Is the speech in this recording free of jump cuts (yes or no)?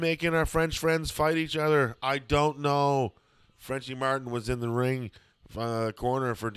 yes